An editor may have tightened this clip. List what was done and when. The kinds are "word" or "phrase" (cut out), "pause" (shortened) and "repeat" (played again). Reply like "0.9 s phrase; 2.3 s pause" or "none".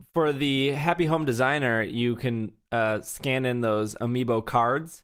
none